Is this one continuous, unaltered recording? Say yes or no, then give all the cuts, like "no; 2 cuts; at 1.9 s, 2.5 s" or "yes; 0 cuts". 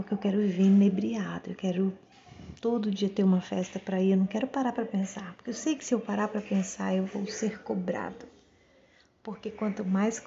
yes; 0 cuts